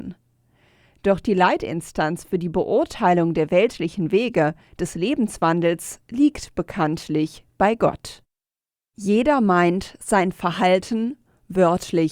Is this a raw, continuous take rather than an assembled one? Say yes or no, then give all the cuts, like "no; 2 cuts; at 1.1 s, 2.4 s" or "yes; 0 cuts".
yes; 0 cuts